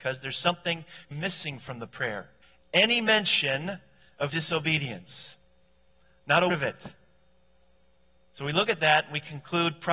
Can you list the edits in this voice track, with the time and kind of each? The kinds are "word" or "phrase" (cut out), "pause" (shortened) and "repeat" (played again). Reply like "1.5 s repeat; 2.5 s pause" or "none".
1.1 s word; 2.4 s pause; 4.3 s word; 6.5 s word